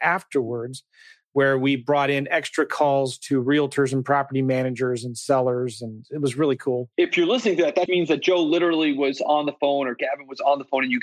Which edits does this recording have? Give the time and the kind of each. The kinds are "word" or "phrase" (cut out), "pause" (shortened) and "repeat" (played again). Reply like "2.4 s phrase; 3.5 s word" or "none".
7.9 s word